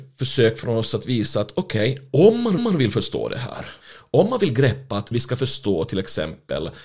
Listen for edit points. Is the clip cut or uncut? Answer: cut